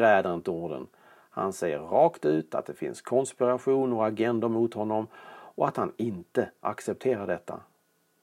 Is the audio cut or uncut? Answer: uncut